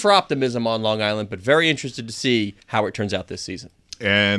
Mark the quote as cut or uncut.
cut